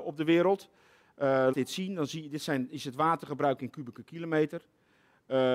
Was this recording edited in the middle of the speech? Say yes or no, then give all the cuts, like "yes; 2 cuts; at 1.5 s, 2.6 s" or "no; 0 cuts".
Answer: yes; 1 cut; at 1.5 s